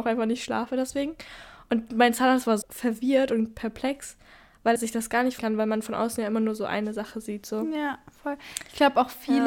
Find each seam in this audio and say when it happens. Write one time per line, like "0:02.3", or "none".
0:02.6
0:04.8
0:05.4